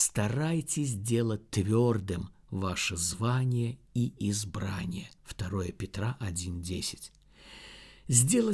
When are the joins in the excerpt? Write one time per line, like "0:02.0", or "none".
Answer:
0:05.2